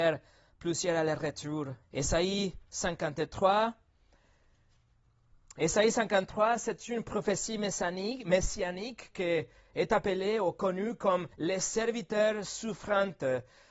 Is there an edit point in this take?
yes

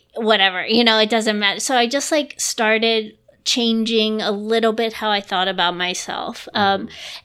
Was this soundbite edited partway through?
no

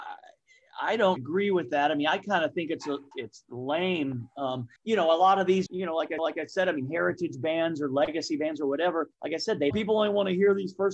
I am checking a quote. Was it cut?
yes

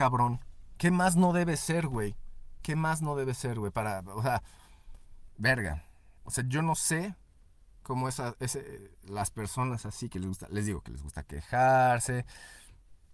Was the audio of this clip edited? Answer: yes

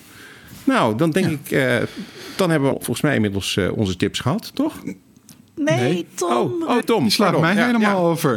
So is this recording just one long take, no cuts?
no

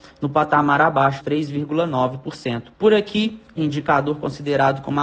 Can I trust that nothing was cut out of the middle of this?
no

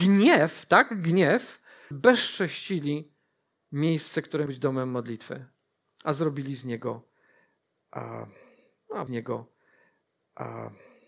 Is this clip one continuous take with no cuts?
no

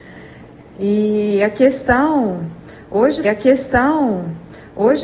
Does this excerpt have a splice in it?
yes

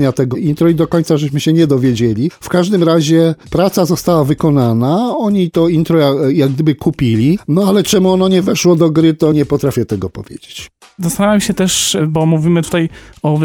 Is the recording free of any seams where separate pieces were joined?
no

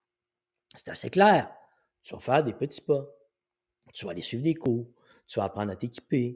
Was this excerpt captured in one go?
yes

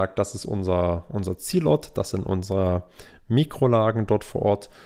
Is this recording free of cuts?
yes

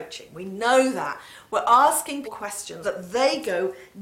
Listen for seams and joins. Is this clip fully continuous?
no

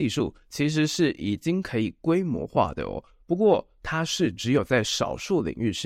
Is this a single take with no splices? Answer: yes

